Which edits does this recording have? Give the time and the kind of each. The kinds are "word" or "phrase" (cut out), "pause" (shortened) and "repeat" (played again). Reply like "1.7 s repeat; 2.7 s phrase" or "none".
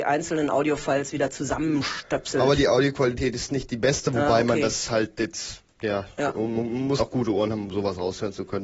7.0 s word